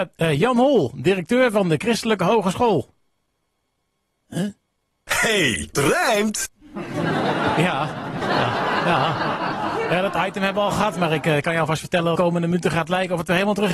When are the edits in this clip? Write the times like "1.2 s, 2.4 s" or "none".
5.7 s, 8.2 s, 12.2 s